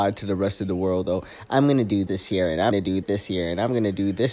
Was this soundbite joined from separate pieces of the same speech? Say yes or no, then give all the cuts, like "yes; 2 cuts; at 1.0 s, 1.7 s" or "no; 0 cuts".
yes; 3 cuts; at 2.1 s, 2.7 s, 3.0 s